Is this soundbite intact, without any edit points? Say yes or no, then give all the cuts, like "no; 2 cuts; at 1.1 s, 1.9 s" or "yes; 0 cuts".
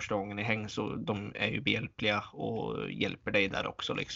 yes; 0 cuts